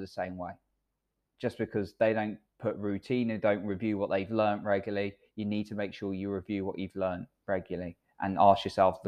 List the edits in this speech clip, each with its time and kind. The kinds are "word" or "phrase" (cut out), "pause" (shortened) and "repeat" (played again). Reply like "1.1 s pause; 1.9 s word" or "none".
none